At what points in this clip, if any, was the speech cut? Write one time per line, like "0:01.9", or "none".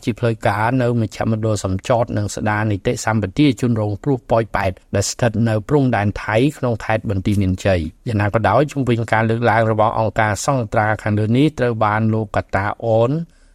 0:04.8
0:08.0